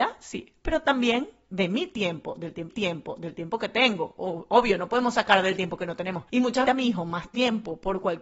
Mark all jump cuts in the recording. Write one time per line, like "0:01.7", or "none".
0:02.7
0:06.3
0:06.6